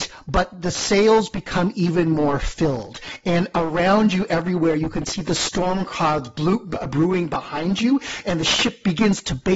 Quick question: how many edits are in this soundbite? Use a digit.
0